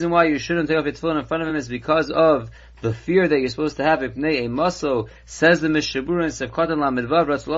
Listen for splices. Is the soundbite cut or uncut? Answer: uncut